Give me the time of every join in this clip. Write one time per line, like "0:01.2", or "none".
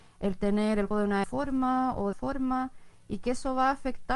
0:00.9
0:01.2
0:02.1